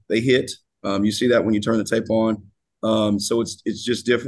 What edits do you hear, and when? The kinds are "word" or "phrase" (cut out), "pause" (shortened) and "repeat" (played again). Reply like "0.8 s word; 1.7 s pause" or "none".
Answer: none